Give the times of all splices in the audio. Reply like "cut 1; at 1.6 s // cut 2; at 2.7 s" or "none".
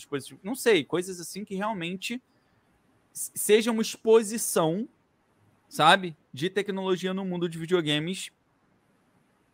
none

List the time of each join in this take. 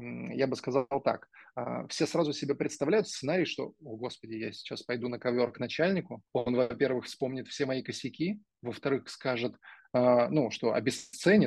cut 1; at 6.3 s

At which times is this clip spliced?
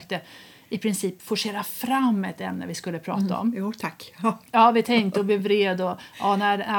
none

